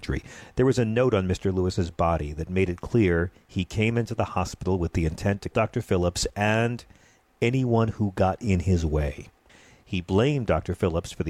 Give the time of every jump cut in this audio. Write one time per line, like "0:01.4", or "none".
0:05.5